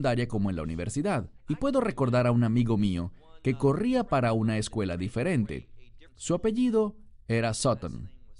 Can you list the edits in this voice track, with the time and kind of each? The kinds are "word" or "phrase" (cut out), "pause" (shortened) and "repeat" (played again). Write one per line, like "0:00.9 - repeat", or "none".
0:01.4 - pause
0:06.1 - pause

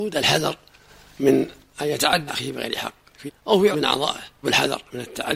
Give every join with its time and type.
0:02.3 - word
0:03.3 - word
0:03.7 - word
0:04.4 - word

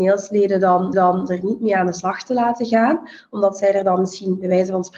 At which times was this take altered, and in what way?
0:00.9 - repeat

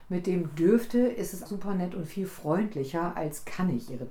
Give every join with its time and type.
0:01.4 - word

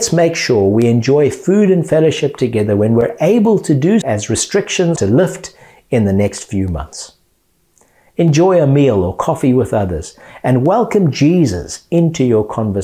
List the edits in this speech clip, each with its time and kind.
0:04.0 - word
0:05.0 - word

